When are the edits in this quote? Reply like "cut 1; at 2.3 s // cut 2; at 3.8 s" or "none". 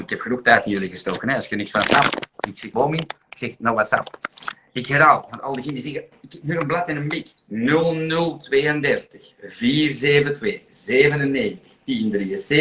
cut 1; at 2.7 s // cut 2; at 7.4 s